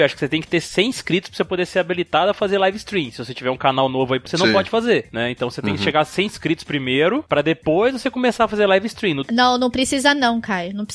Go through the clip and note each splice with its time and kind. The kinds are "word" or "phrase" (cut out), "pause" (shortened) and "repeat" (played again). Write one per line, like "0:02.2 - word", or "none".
0:04.3 - word